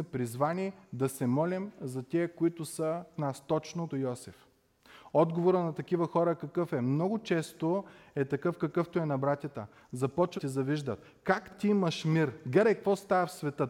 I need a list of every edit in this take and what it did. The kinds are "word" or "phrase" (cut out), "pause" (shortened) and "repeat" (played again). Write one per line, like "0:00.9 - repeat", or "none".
0:03.2 - word
0:03.9 - word
0:10.4 - word
0:11.5 - word